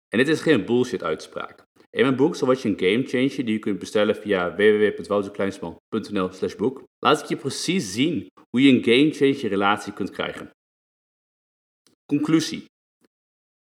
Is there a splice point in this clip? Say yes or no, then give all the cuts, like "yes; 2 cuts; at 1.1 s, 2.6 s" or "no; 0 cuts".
yes; 1 cut; at 6.9 s